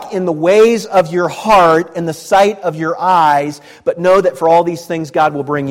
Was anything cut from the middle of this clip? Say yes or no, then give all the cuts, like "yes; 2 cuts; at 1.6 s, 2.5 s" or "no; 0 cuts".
no; 0 cuts